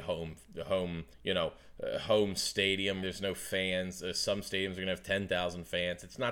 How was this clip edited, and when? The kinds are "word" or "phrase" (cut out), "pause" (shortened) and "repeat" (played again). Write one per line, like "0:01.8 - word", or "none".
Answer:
0:01.1 - pause
0:03.0 - word